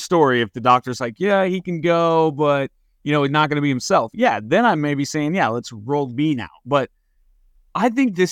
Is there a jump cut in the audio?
no; 0 cuts

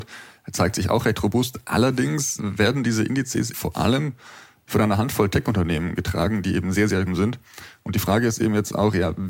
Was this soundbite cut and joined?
yes; 3 cuts; at 2.4 s, 3.5 s, 7.1 s

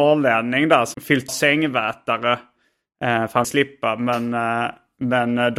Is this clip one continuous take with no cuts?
no; 3 cuts; at 0.9 s, 1.3 s, 3.4 s

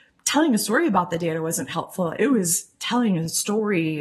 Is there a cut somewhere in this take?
no; 0 cuts

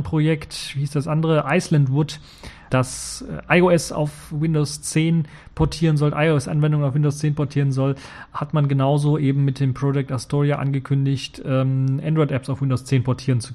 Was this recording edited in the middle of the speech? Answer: yes; 1 cut; at 2.7 s

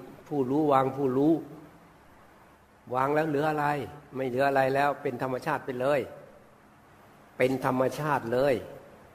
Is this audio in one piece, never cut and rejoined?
no; 1 cut; at 2.6 s

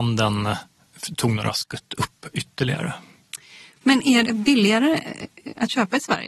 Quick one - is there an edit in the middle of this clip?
yes; 1 cut; at 4.2 s

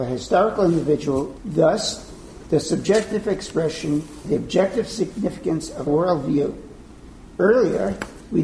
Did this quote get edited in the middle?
yes; 3 cuts; at 1.4 s, 4.2 s, 5.9 s

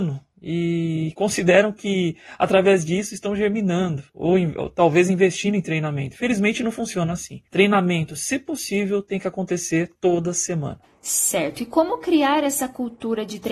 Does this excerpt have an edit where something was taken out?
yes; 3 cuts; at 4.1 s, 7.5 s, 9.9 s

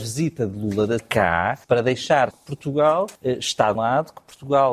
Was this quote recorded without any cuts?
no; 5 cuts; at 1.0 s, 1.6 s, 2.3 s, 3.2 s, 3.7 s

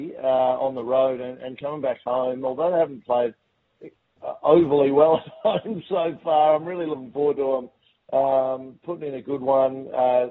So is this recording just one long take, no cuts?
yes; 0 cuts

